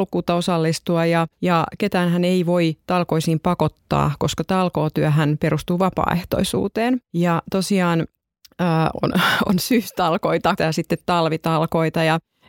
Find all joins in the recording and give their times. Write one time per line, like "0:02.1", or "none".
0:01.3
0:07.0